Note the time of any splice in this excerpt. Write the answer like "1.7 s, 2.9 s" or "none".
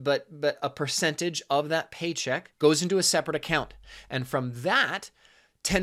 2.5 s